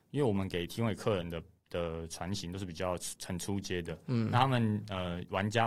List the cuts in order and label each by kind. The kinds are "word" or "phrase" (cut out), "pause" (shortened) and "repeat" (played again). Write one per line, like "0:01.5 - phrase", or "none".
none